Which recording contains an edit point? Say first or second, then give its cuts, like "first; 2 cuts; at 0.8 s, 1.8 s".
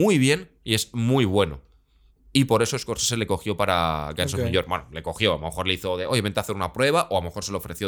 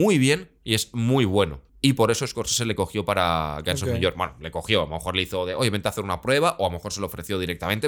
second; 1 cut; at 1.7 s